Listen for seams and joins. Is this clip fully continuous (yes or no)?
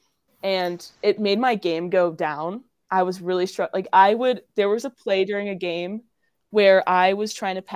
yes